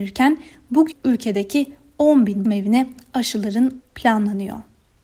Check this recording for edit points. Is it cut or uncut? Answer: cut